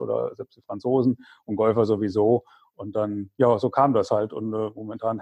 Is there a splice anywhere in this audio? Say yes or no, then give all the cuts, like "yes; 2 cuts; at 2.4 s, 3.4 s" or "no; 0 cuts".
no; 0 cuts